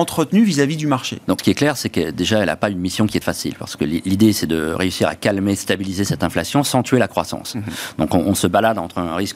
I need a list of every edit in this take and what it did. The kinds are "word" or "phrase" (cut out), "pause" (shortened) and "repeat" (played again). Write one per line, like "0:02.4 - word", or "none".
0:01.4 - word
0:03.2 - word